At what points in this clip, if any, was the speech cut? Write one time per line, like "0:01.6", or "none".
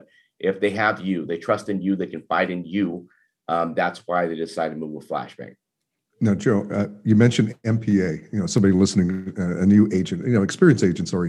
none